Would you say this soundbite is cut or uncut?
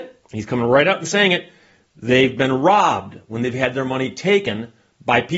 uncut